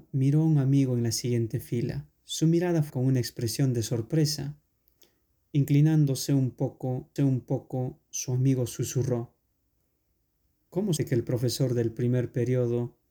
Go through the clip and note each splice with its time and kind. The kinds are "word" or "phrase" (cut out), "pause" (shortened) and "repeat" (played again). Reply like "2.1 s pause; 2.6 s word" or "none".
2.1 s pause; 2.9 s word; 7.2 s repeat; 11.0 s word

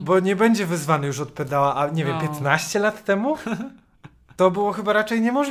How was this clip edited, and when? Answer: none

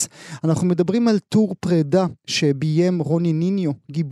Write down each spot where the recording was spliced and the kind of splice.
none

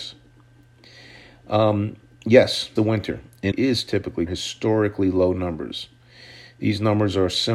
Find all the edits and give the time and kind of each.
2.8 s word; 3.5 s word; 4.3 s phrase

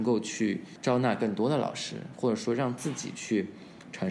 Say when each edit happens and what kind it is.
none

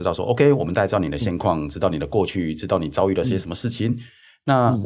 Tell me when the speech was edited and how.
none

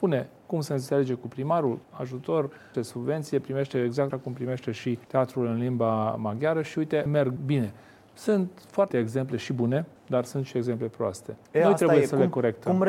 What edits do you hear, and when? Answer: 1.8 s word; 2.7 s word; 4.1 s word; 5.0 s pause; 7.1 s word; 7.4 s word; 8.9 s word; 10.0 s pause; 11.4 s pause

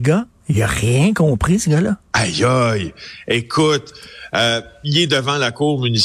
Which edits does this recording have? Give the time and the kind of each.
2.0 s pause

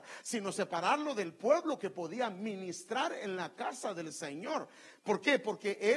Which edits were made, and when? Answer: none

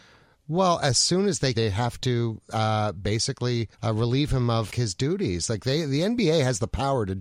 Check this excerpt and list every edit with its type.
1.5 s phrase; 3.7 s pause; 4.7 s word

